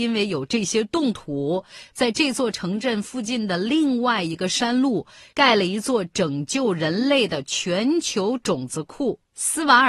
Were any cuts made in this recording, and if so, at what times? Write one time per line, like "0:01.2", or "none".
none